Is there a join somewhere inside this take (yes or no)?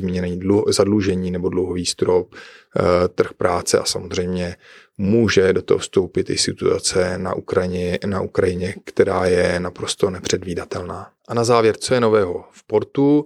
yes